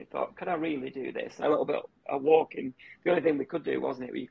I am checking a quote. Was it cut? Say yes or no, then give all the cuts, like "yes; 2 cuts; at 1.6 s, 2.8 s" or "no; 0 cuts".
yes; 1 cut; at 1.4 s